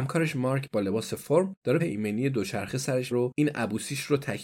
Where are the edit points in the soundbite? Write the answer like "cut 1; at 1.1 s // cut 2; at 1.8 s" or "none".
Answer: cut 1; at 1.8 s // cut 2; at 3.1 s

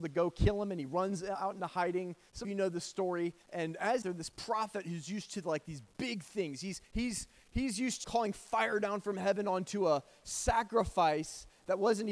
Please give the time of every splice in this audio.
cut 1; at 2.4 s // cut 2; at 3.4 s // cut 3; at 4.0 s // cut 4; at 6.8 s // cut 5; at 8.0 s

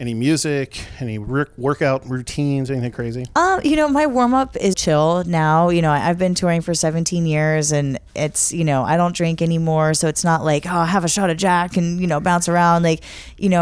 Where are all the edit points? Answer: cut 1; at 4.7 s

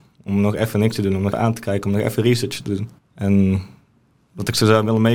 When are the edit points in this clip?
cut 1; at 1.3 s // cut 2; at 3.0 s

